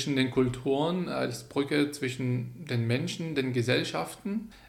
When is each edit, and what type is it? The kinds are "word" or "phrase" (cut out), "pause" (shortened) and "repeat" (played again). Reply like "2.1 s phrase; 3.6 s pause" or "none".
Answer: none